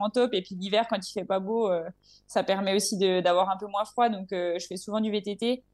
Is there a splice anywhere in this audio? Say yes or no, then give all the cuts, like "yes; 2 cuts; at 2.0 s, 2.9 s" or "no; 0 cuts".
no; 0 cuts